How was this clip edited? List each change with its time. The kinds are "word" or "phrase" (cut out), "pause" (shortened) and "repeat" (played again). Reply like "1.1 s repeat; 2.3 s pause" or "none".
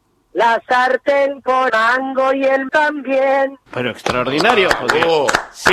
1.7 s word; 2.7 s word; 3.7 s pause